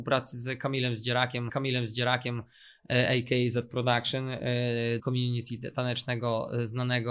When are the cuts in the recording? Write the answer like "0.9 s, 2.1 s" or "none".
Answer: 1.5 s, 5.0 s